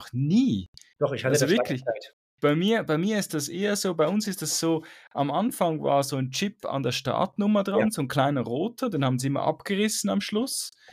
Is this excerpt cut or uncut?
uncut